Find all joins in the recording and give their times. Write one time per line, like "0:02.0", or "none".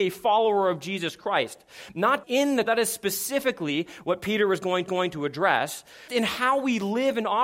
0:02.2
0:02.7
0:04.9
0:06.1